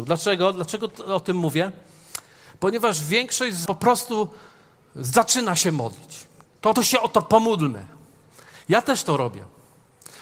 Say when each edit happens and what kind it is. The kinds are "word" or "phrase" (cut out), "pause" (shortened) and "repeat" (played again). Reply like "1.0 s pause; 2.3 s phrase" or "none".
3.7 s word; 6.8 s word